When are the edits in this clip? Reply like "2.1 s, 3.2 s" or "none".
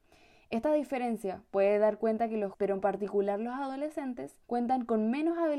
2.5 s, 4.4 s